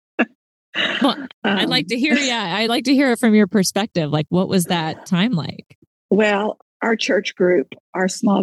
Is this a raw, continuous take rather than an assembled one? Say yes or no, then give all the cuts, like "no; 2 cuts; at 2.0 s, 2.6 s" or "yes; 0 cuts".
yes; 0 cuts